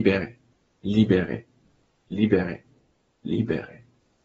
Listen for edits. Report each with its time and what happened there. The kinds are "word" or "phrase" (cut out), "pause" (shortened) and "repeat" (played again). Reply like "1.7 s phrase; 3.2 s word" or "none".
none